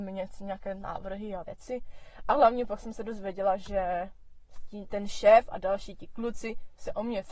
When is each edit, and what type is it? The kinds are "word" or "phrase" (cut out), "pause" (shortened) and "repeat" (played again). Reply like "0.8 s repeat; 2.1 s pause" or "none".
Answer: 1.4 s word